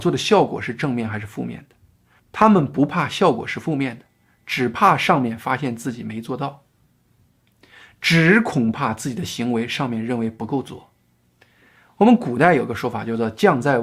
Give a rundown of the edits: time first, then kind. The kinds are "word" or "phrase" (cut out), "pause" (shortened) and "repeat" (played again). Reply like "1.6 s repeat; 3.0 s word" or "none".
none